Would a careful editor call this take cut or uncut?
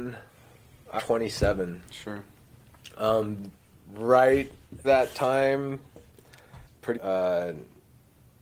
cut